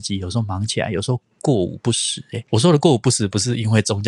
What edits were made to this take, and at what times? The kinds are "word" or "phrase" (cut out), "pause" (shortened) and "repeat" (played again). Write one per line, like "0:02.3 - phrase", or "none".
0:02.5 - pause